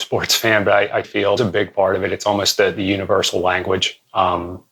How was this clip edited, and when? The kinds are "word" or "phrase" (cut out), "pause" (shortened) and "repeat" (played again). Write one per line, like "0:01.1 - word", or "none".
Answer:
0:01.0 - word
0:01.4 - word